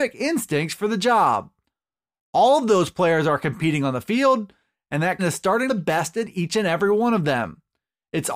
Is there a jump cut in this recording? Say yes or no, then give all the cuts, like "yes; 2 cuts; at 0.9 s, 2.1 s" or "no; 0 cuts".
yes; 2 cuts; at 5.2 s, 5.7 s